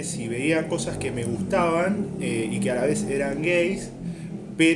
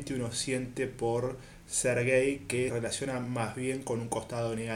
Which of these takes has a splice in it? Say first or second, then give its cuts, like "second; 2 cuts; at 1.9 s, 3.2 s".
second; 1 cut; at 2.7 s